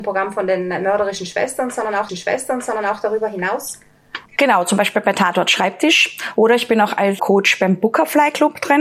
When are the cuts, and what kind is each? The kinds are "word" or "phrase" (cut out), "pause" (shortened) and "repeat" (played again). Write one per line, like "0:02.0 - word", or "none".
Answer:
0:02.1 - repeat
0:04.3 - pause
0:07.2 - word

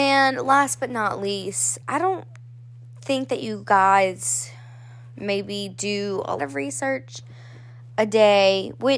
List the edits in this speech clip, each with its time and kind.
0:01.8 - word
0:06.4 - word

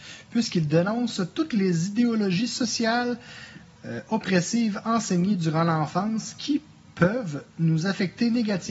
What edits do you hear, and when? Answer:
none

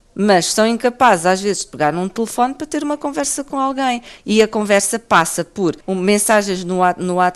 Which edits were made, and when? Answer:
0:05.8 - pause

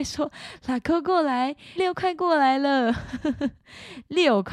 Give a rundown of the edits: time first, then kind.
0:01.8 - word

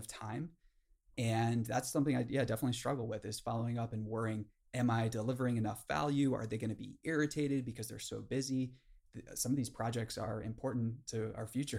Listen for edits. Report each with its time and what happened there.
none

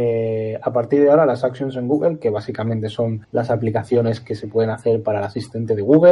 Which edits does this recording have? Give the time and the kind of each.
0:03.2 - pause

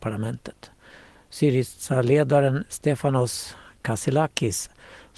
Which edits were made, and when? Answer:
none

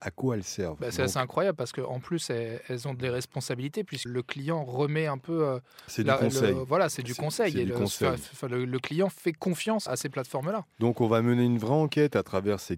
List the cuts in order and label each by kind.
0:04.1 - word
0:09.9 - word

